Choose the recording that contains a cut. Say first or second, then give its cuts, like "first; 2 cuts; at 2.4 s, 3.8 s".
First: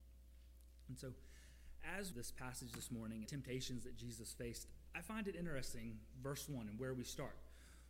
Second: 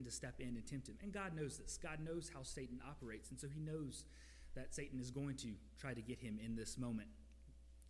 first; 2 cuts; at 2.1 s, 3.3 s